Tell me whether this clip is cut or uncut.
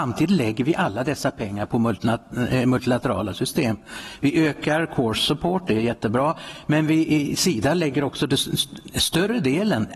uncut